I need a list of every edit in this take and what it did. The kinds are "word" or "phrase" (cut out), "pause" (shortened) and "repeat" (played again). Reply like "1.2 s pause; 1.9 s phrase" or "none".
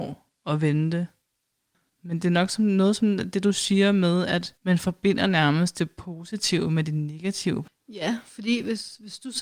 4.6 s pause